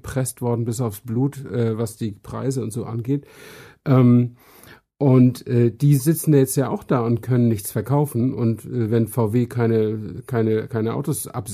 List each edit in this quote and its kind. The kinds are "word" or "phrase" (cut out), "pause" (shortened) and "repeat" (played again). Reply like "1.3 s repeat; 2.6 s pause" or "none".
none